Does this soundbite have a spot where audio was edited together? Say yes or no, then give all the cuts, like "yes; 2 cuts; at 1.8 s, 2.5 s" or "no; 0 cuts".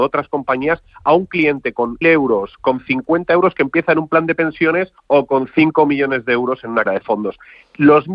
yes; 3 cuts; at 2.0 s, 5.0 s, 6.9 s